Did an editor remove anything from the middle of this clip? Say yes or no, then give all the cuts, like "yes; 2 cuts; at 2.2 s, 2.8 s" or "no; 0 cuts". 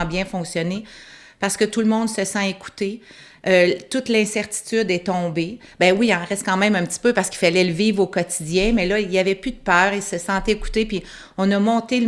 no; 0 cuts